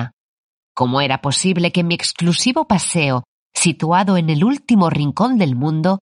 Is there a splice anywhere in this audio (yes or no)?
no